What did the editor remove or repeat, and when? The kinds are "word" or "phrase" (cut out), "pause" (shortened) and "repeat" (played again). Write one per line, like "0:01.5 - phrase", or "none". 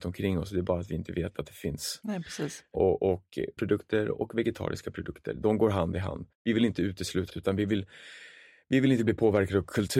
0:03.6 - phrase
0:06.3 - pause
0:07.3 - word

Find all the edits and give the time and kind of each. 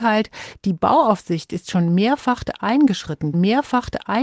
0:03.3 - repeat

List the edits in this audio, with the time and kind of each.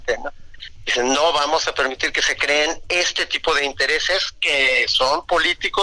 none

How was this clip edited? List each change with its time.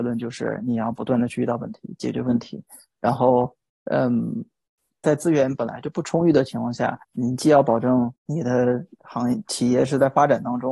0:05.0 - phrase
0:07.0 - pause
0:08.2 - pause

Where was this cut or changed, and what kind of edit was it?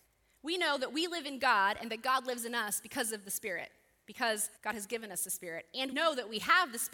0:04.6 - pause
0:05.9 - word

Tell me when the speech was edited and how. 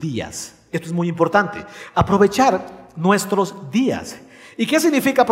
none

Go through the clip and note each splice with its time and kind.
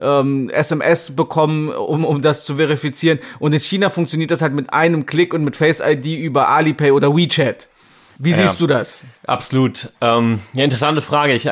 0:09.2 - pause

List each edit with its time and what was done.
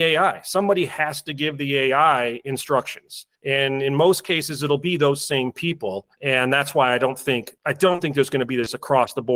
0:03.4 - pause
0:06.1 - pause
0:07.6 - pause

